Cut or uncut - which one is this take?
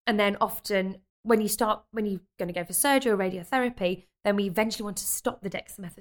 cut